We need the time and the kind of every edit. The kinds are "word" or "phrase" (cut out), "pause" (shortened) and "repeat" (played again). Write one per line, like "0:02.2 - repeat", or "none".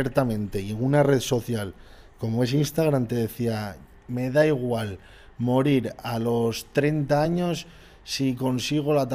none